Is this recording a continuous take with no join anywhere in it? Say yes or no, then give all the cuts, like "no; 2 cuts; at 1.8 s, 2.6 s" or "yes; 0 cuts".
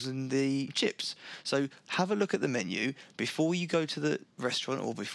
yes; 0 cuts